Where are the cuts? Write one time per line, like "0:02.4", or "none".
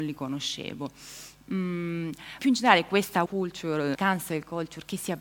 0:02.4
0:03.3
0:03.9